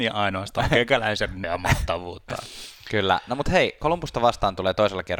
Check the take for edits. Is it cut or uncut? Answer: cut